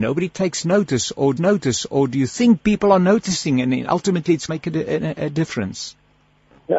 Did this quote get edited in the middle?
yes; 2 cuts; at 1.4 s, 4.5 s

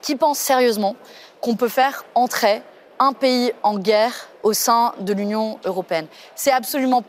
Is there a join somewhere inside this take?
no; 0 cuts

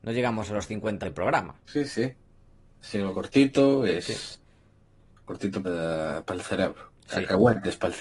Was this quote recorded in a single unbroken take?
no; 5 cuts; at 1.0 s, 1.6 s, 3.1 s, 5.6 s, 7.0 s

